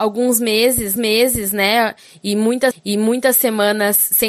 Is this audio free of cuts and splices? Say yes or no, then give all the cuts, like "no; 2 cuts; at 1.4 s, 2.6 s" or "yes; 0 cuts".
no; 2 cuts; at 1.0 s, 2.7 s